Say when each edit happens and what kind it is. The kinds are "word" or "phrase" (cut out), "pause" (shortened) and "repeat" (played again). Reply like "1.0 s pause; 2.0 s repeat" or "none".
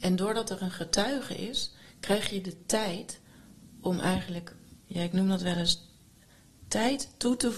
4.8 s word